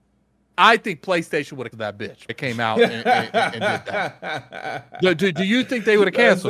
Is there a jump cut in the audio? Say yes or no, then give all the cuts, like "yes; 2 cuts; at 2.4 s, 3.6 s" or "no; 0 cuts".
yes; 2 cuts; at 1.7 s, 2.3 s